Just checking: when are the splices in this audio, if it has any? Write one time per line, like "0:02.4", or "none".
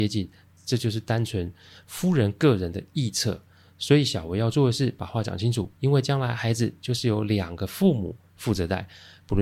0:05.7

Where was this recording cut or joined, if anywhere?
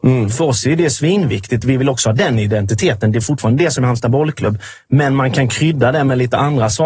none

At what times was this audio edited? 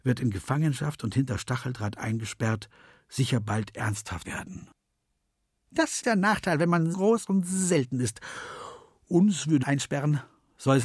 0:04.2
0:06.0
0:06.9
0:09.6

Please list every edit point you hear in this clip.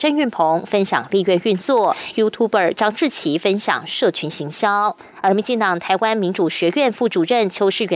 0:02.1

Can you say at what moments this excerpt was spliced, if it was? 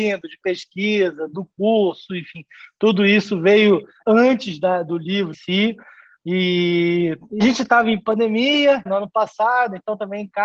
0:04.0
0:05.3
0:07.4
0:08.9

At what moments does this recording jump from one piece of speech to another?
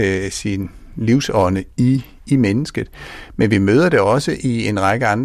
0:01.7

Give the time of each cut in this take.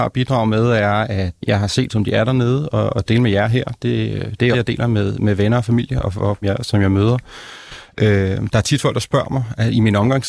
0:01.4
0:01.9
0:03.1
0:04.5
0:06.4

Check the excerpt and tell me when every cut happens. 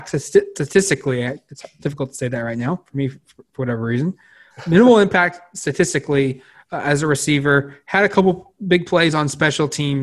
none

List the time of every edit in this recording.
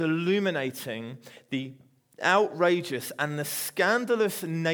none

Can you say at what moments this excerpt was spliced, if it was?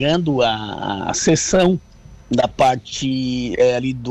0:02.2

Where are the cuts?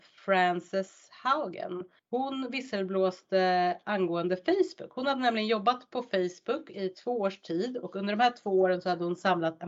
0:02.0

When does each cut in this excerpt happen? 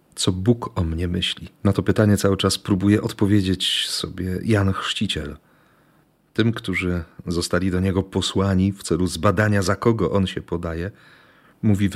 0:01.5

